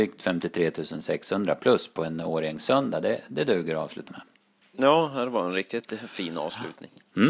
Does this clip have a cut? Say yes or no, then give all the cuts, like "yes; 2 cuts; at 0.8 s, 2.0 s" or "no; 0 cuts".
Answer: yes; 1 cut; at 4.1 s